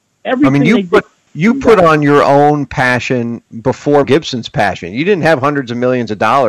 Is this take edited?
yes; 2 cuts; at 1.3 s, 4.0 s

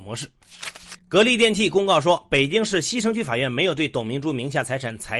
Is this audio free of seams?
no; 1 cut; at 1.0 s

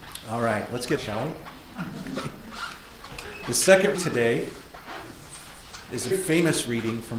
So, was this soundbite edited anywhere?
yes; 3 cuts; at 1.0 s, 3.9 s, 6.1 s

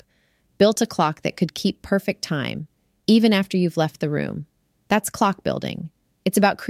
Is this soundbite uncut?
yes; 0 cuts

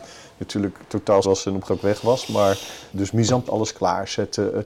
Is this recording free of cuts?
no; 4 cuts; at 1.2 s, 1.7 s, 2.9 s, 3.5 s

